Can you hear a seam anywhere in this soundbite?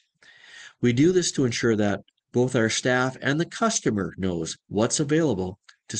no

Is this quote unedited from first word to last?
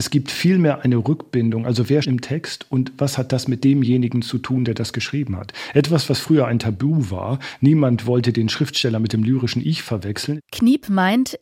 no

